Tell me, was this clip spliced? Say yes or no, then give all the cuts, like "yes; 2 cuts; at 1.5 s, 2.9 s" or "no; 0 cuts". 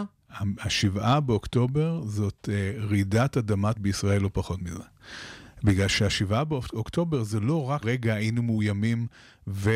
yes; 2 cuts; at 3.7 s, 7.8 s